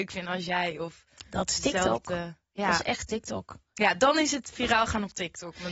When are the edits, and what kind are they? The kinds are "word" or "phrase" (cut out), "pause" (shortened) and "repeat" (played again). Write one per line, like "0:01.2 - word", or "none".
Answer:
none